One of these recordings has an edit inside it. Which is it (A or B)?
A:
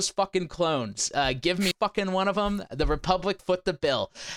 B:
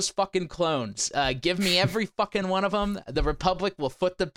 A